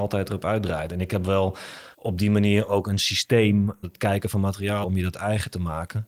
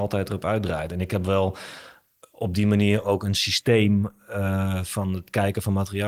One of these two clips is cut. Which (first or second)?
first